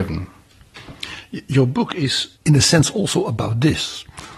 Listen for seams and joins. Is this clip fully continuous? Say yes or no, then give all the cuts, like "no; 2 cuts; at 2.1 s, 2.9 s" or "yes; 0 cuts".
no; 1 cut; at 2.4 s